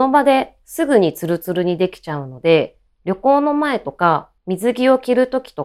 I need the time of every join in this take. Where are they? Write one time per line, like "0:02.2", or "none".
0:04.4